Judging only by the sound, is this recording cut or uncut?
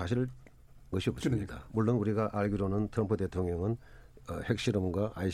cut